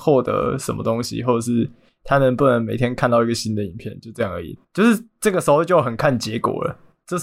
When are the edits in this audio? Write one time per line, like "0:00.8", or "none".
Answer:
0:04.6